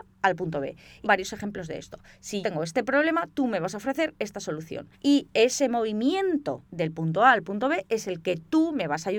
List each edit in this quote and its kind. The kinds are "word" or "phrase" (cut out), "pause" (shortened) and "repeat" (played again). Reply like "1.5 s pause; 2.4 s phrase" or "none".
1.0 s phrase; 2.4 s word; 4.9 s pause